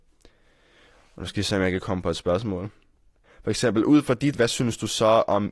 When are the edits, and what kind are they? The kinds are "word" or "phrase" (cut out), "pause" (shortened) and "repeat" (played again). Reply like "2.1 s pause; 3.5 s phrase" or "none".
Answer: 4.3 s word

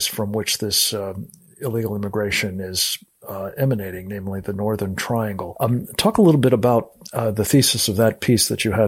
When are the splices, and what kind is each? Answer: none

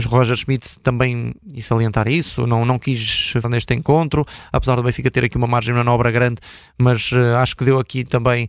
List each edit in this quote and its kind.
3.4 s word

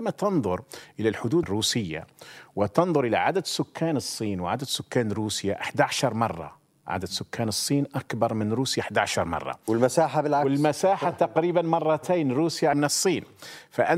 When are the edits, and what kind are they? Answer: 1.4 s word; 12.7 s word

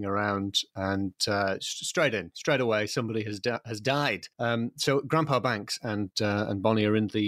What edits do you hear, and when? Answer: 4.3 s pause

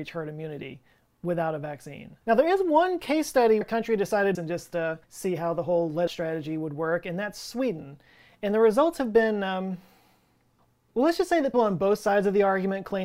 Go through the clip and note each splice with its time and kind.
2.2 s pause; 3.6 s word; 4.3 s phrase; 5.0 s pause; 6.1 s phrase; 10.6 s pause; 11.5 s word

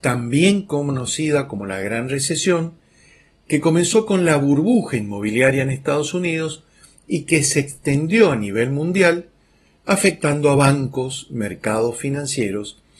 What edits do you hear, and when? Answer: none

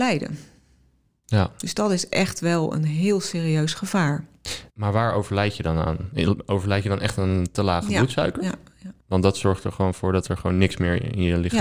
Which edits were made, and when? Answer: 4.7 s pause; 9.0 s pause

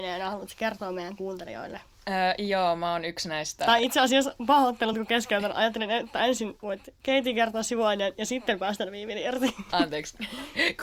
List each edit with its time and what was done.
none

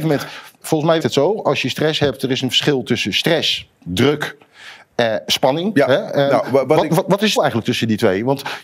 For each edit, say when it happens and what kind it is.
1.0 s word; 7.4 s word

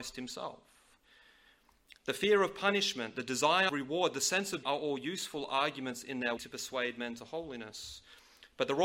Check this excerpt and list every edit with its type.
3.7 s word; 4.6 s word; 6.4 s word

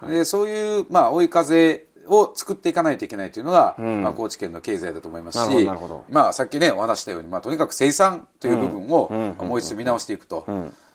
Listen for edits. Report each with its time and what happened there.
2.0 s pause

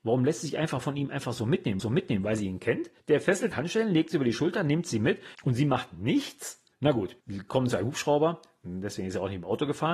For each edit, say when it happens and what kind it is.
1.8 s repeat; 3.0 s pause; 3.5 s phrase; 5.3 s pause; 6.7 s pause; 7.2 s pause

